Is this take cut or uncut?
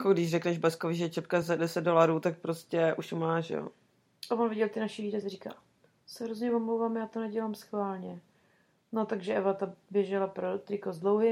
uncut